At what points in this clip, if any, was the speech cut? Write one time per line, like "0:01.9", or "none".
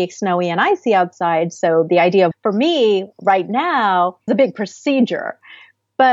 0:02.3
0:04.3